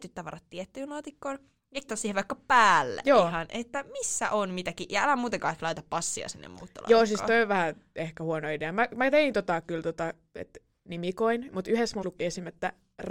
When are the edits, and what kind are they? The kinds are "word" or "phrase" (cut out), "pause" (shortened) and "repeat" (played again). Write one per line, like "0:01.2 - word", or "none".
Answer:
0:01.9 - word
0:12.0 - word